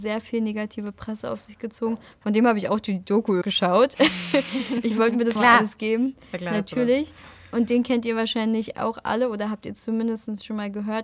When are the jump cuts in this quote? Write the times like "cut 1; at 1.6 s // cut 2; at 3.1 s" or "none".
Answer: cut 1; at 3.4 s // cut 2; at 5.4 s